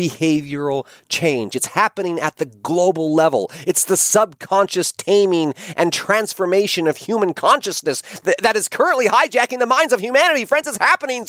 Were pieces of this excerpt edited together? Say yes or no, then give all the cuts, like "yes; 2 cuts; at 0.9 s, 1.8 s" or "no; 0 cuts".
no; 0 cuts